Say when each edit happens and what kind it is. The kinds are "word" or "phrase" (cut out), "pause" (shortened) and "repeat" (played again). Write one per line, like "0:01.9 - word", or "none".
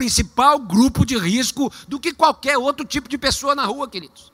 none